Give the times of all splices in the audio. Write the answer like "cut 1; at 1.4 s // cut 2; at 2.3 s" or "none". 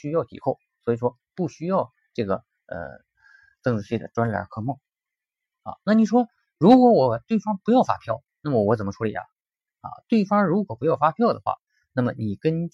none